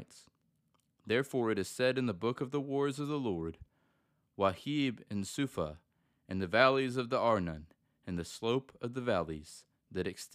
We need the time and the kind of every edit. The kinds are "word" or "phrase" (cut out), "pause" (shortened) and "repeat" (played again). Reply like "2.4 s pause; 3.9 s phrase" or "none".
none